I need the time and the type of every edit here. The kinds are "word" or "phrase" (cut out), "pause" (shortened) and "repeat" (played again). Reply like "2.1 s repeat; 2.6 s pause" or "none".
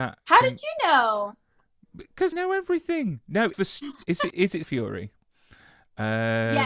2.3 s word; 3.5 s word; 4.3 s word; 4.6 s word